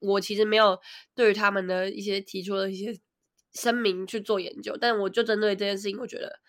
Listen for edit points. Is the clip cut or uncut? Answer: uncut